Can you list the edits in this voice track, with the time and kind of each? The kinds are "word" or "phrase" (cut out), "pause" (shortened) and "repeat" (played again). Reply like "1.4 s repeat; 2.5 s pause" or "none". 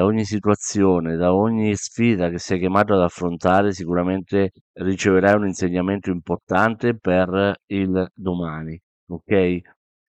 4.6 s pause; 8.9 s pause